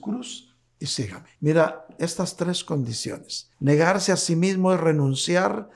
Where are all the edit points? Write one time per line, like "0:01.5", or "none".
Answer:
0:01.4
0:03.5